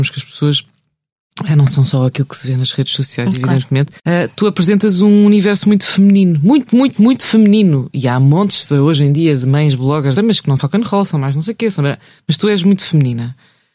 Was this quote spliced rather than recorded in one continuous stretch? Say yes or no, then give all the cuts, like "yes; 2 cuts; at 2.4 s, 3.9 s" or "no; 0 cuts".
yes; 3 cuts; at 4.0 s, 10.2 s, 10.6 s